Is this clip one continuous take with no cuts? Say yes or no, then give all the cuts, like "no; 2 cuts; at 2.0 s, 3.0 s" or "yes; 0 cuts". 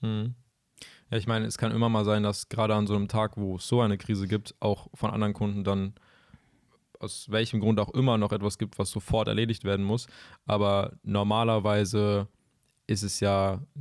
yes; 0 cuts